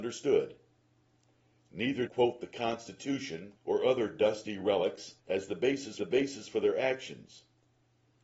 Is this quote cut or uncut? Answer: cut